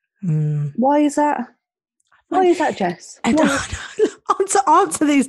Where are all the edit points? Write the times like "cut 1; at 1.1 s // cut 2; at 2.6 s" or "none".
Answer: none